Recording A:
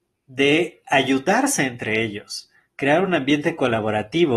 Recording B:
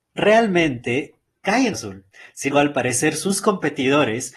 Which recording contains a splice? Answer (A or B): B